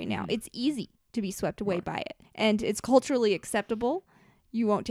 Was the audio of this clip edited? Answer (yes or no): yes